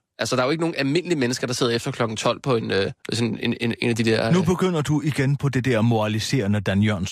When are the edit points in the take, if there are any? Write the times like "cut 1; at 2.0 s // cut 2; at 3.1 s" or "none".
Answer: cut 1; at 3.0 s